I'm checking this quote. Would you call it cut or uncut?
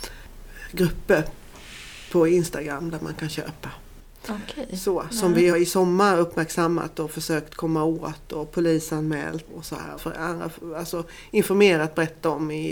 cut